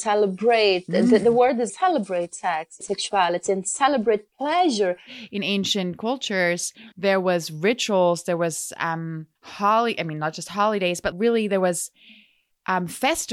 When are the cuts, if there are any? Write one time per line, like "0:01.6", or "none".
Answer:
0:01.7
0:02.8
0:04.3
0:06.9
0:09.4
0:11.1